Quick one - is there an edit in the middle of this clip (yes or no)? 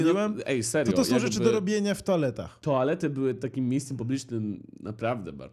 no